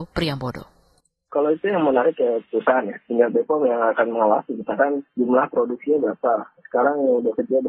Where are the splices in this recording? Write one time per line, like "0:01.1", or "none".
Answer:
0:05.1